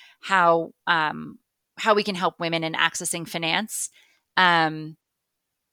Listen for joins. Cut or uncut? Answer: uncut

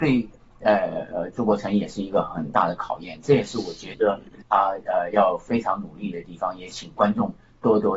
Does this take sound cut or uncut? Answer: cut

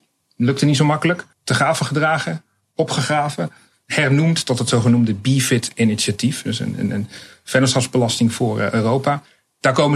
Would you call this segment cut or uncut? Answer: cut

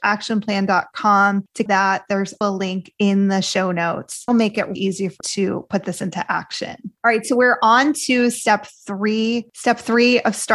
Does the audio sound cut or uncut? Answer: cut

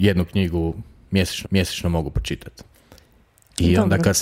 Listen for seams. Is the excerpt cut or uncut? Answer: cut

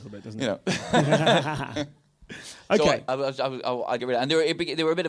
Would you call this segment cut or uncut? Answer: cut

